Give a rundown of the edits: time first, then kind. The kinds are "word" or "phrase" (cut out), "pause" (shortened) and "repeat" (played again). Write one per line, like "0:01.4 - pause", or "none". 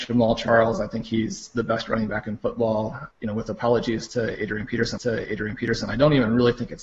0:03.1 - pause
0:05.0 - repeat